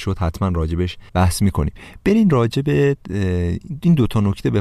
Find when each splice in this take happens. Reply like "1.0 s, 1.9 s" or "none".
1.1 s